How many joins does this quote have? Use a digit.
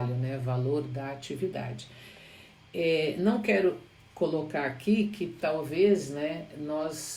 0